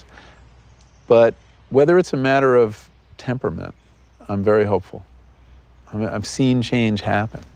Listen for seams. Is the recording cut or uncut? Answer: cut